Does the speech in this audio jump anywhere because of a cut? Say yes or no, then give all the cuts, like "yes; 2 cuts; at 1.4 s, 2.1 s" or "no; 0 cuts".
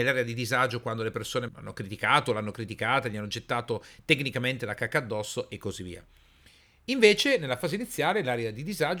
yes; 1 cut; at 1.5 s